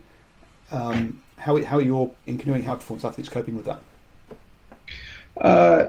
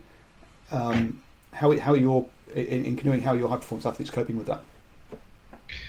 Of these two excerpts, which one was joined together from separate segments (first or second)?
first